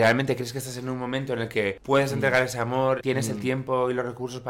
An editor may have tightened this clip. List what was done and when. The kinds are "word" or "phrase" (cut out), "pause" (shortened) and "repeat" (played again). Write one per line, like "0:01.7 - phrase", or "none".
0:03.0 - word